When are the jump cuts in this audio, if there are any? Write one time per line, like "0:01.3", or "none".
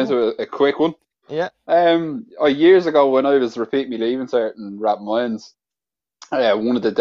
0:02.3